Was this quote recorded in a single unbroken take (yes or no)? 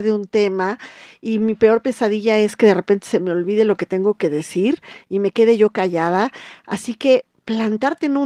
yes